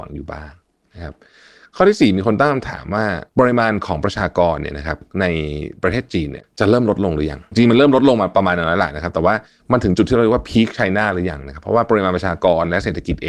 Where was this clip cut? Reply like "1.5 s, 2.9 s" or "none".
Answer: 3.3 s